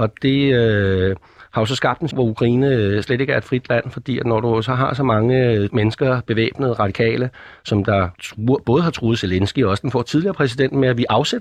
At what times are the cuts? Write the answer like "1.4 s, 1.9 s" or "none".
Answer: 2.1 s, 5.7 s, 8.1 s